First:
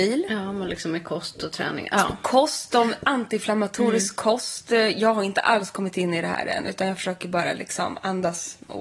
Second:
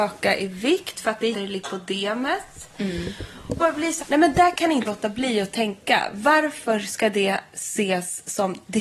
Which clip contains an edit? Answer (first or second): second